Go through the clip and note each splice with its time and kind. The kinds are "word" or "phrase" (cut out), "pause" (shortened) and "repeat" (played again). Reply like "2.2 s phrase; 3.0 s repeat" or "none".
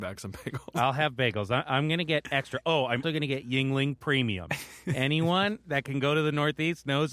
3.0 s word